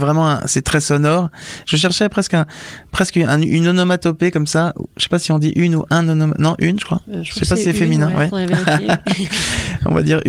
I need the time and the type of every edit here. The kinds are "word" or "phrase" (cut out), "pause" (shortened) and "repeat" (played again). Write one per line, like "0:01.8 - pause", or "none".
none